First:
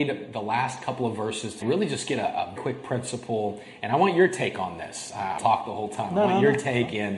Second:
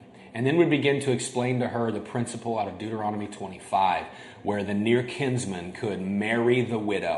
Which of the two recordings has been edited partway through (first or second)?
first